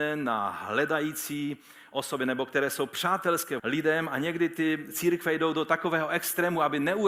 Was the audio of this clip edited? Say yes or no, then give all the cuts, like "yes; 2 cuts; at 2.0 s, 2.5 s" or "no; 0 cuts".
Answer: yes; 1 cut; at 3.6 s